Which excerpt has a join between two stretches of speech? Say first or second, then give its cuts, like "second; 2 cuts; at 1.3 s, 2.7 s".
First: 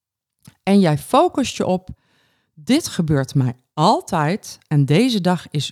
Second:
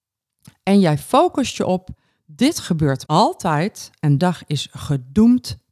second; 3 cuts; at 2.1 s, 3.0 s, 4.2 s